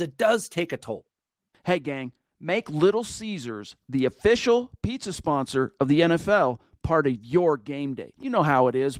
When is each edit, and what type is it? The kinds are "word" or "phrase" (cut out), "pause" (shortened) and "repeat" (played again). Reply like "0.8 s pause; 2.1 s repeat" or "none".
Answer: none